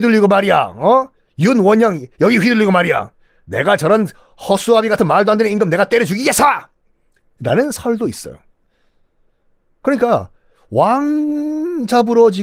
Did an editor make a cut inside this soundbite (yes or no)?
no